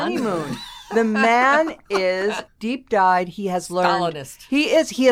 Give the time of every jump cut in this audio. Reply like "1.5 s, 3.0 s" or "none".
2.5 s